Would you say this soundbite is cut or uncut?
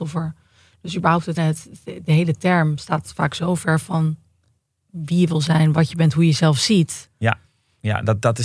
cut